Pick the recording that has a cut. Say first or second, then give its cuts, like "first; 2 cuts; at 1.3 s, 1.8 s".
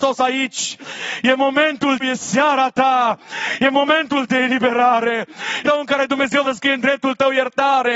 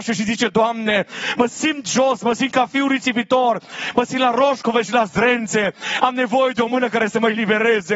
first; 4 cuts; at 2.0 s, 4.3 s, 5.6 s, 6.4 s